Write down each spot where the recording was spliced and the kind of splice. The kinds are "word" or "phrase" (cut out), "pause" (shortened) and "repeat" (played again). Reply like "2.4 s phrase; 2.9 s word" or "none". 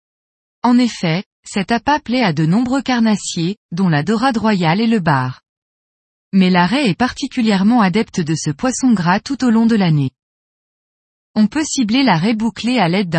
none